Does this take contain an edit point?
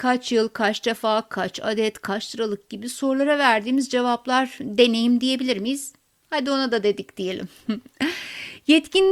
no; 0 cuts

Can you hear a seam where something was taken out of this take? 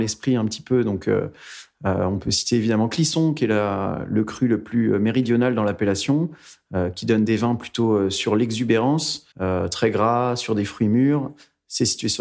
yes; 1 cut; at 9.3 s

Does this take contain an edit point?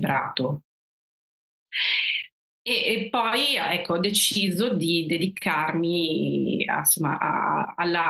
no; 0 cuts

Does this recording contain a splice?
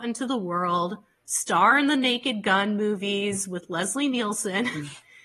no; 0 cuts

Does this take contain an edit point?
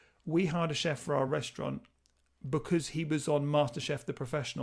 no; 0 cuts

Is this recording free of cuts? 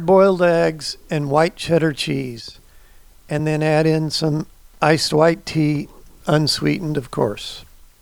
yes; 0 cuts

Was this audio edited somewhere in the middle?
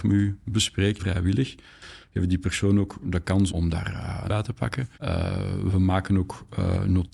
yes; 4 cuts; at 1.0 s, 3.5 s, 4.3 s, 4.9 s

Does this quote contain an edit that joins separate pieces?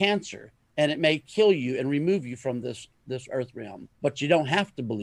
yes; 1 cut; at 3.9 s

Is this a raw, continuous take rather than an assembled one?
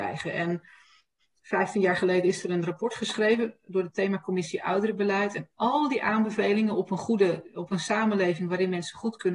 yes; 0 cuts

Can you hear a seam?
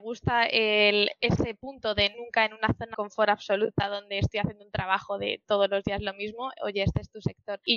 yes; 3 cuts; at 2.1 s, 2.9 s, 6.6 s

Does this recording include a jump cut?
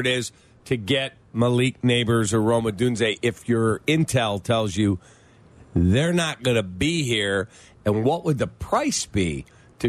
no; 0 cuts

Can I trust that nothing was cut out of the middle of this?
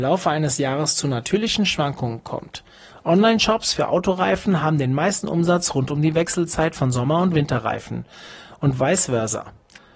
yes; 0 cuts

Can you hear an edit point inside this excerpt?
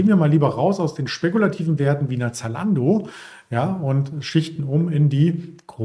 no; 0 cuts

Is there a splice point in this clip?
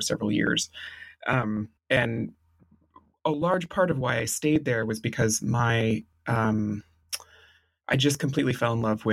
yes; 1 cut; at 1.8 s

